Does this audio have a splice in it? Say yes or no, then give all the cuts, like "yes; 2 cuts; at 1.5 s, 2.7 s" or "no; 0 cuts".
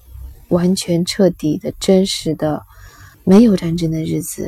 yes; 1 cut; at 3.1 s